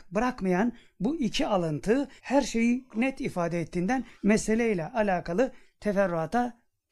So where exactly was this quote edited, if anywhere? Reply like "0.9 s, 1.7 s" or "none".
2.2 s, 2.9 s, 4.1 s